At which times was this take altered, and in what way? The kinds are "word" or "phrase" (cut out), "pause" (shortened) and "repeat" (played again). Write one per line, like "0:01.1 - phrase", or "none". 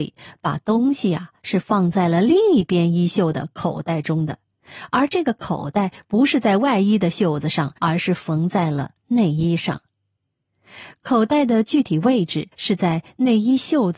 0:07.8 - pause
0:12.5 - pause